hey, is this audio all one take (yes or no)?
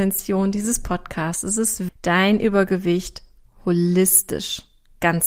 no